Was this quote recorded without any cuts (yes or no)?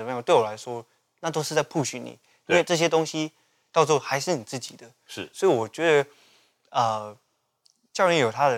yes